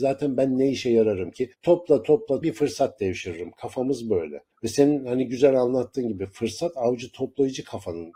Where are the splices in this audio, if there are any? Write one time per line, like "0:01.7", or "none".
0:01.5
0:02.4
0:04.5